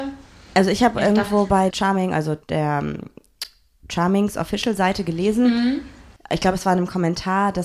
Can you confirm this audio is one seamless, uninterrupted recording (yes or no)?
no